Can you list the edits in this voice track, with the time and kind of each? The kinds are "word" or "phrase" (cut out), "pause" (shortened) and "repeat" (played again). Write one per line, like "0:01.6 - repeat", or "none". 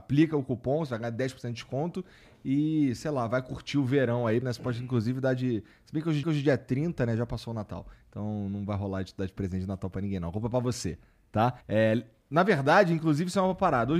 0:04.4 - word
0:06.2 - repeat
0:11.6 - pause